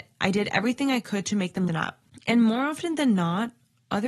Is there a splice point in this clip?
yes; 1 cut; at 1.7 s

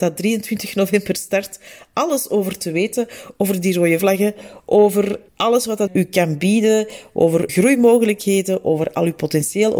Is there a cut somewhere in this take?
yes; 4 cuts; at 4.0 s, 5.3 s, 5.9 s, 7.5 s

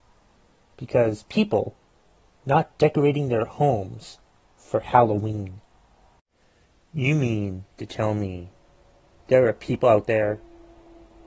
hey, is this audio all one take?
yes; 0 cuts

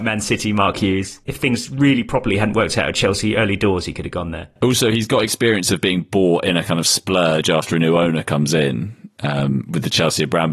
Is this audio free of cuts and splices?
yes; 0 cuts

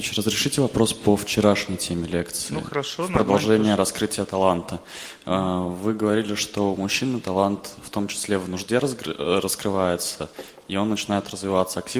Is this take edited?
no; 0 cuts

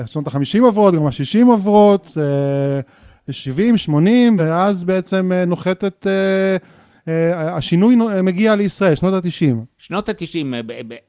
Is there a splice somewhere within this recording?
no; 0 cuts

